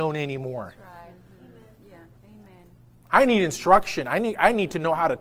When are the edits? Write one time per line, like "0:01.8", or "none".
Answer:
none